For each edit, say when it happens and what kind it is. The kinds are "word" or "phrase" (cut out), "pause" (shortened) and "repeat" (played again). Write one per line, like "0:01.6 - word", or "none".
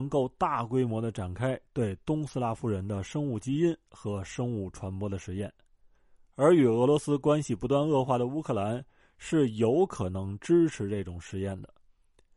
none